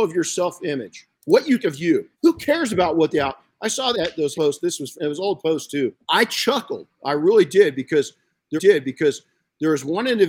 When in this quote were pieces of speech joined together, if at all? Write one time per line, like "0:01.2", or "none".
0:01.1
0:01.6
0:02.1
0:03.9
0:04.3
0:05.0
0:06.0
0:08.6